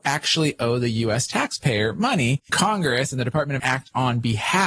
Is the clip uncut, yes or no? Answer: no